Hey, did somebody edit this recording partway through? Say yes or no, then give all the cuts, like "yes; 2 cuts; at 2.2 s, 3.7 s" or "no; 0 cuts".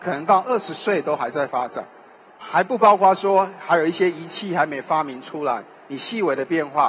no; 0 cuts